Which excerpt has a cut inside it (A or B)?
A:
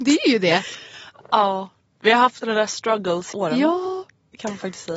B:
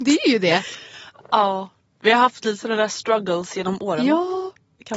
A